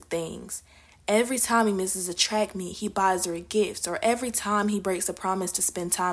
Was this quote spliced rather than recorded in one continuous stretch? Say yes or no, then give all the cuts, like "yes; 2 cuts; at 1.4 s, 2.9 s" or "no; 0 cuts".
no; 0 cuts